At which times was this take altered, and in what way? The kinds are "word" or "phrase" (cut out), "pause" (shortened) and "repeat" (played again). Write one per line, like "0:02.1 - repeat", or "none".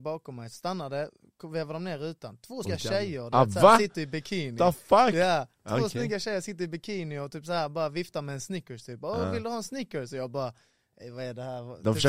0:02.6 - word